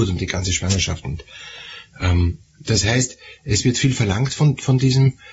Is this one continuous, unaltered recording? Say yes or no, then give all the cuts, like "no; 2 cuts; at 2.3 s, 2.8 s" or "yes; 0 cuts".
yes; 0 cuts